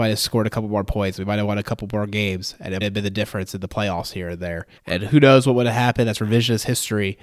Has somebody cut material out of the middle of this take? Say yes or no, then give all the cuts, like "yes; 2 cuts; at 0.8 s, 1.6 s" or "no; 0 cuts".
yes; 2 cuts; at 2.8 s, 4.8 s